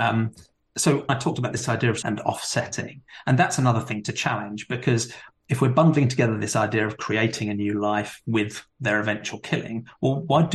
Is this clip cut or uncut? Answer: cut